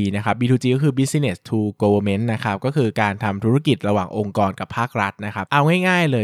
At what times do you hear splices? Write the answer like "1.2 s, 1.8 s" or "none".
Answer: none